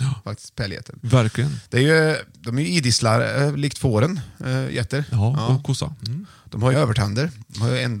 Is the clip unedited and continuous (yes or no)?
no